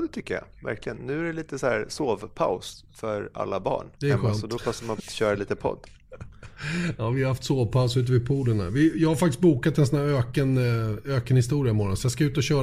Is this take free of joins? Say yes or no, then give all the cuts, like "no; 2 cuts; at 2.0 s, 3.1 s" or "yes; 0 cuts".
no; 2 cuts; at 3.9 s, 5.0 s